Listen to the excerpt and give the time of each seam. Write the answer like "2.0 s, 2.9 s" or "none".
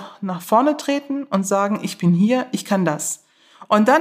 none